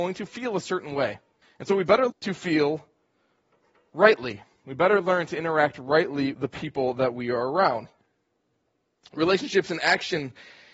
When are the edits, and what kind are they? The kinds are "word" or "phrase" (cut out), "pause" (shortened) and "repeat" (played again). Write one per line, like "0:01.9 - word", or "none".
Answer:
0:01.4 - pause
0:02.1 - word
0:06.3 - word